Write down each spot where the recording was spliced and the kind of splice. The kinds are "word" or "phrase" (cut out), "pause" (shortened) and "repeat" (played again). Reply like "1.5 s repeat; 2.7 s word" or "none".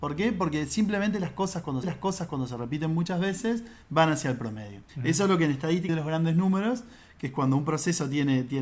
1.8 s repeat; 4.9 s pause; 5.9 s phrase